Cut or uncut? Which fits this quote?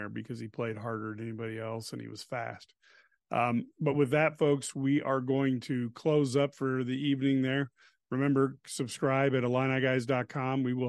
uncut